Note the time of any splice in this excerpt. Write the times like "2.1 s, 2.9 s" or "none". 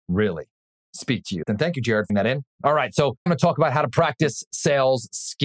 2.1 s, 2.5 s, 3.3 s